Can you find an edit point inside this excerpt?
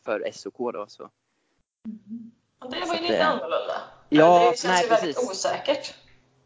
no; 0 cuts

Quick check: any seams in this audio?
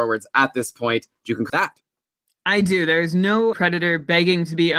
yes; 2 cuts; at 1.5 s, 3.5 s

